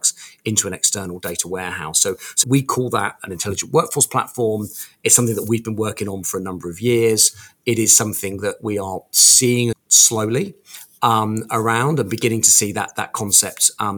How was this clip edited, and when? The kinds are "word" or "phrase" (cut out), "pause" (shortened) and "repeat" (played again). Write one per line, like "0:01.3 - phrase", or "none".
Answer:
0:02.4 - word
0:09.7 - word